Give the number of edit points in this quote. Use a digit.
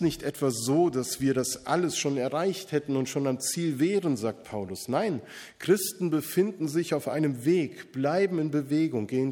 0